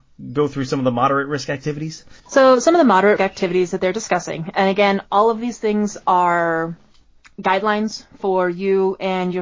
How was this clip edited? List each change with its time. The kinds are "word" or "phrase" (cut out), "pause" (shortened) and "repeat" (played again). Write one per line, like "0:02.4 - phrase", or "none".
0:02.2 - pause
0:03.2 - word